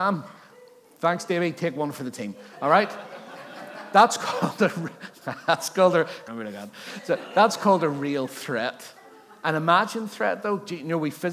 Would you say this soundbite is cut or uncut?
cut